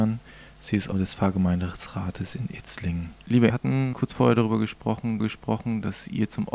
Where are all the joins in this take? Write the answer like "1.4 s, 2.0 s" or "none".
0.9 s, 3.5 s, 3.9 s, 5.2 s